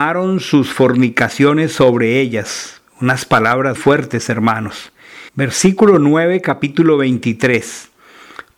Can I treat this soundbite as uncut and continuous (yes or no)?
no